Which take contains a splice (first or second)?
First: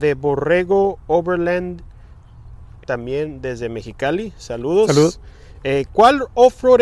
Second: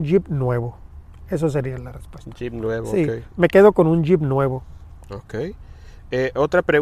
first